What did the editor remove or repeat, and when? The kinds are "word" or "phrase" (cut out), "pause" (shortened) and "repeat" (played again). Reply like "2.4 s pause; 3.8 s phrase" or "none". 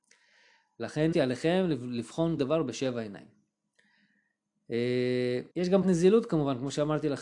1.1 s word; 2.4 s word; 5.5 s pause; 5.8 s word